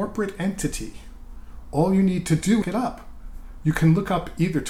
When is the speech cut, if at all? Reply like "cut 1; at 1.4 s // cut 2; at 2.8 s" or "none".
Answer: cut 1; at 2.6 s